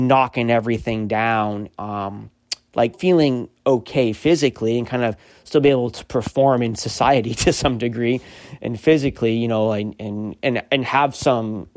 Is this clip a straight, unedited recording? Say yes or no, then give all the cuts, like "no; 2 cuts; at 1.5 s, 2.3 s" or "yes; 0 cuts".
no; 1 cut; at 2.9 s